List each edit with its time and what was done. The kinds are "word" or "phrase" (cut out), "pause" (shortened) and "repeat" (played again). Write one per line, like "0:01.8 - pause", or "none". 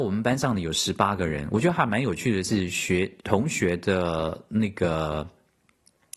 0:03.2 - pause